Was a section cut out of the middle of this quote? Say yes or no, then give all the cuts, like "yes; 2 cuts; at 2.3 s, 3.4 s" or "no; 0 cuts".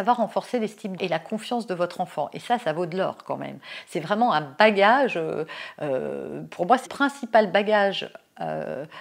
yes; 2 cuts; at 1.0 s, 6.9 s